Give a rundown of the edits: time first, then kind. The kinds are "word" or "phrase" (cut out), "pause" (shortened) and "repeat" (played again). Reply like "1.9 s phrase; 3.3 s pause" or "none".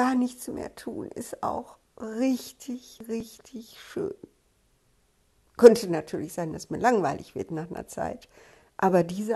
none